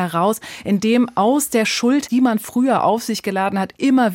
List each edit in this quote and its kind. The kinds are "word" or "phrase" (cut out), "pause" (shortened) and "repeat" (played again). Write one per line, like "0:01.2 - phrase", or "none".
0:02.1 - word

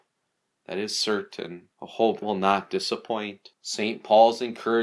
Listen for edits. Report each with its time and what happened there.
0:01.7 - pause
0:02.2 - word
0:03.5 - pause

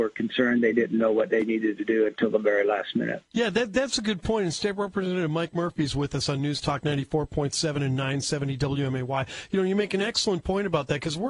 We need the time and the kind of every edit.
0:03.3 - pause

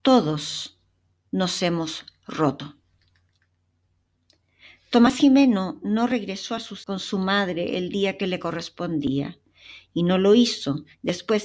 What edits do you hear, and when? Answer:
0:06.8 - word

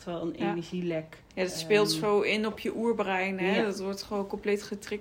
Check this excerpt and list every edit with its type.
0:01.3 - pause

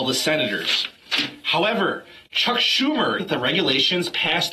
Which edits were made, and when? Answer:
0:03.2 - phrase

